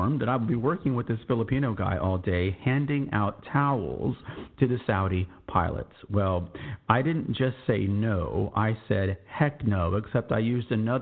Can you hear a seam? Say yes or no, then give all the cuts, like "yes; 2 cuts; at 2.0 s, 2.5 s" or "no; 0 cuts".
no; 0 cuts